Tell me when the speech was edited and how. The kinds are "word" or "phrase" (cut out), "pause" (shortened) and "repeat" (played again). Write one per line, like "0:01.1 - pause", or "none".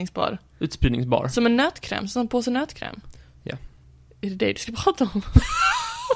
0:03.8 - pause

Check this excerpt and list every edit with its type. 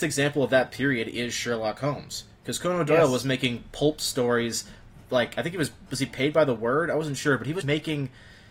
0:07.6 - word

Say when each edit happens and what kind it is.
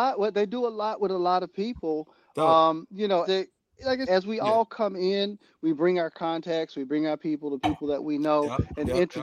0:03.2 - word
0:04.1 - word

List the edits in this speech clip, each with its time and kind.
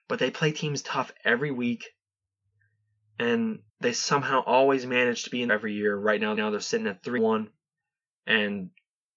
0:03.7 - pause
0:05.5 - phrase
0:06.3 - repeat
0:07.2 - word

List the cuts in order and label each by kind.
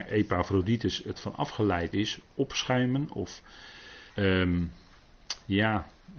0:01.1 - phrase
0:01.9 - word
0:04.1 - pause

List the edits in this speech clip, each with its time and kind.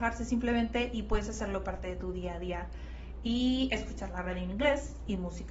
none

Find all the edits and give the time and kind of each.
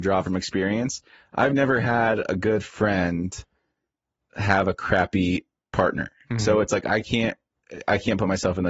none

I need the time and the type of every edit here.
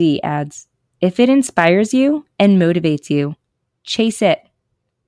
none

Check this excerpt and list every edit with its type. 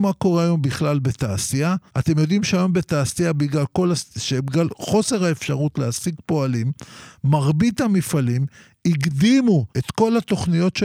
0:01.9 - pause
0:09.7 - pause

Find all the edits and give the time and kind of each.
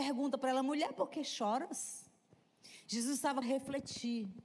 0:03.4 - phrase

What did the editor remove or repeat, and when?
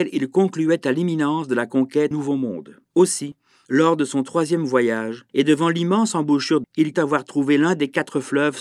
0:02.1 - word
0:02.8 - pause
0:05.3 - pause
0:06.6 - word
0:06.9 - word

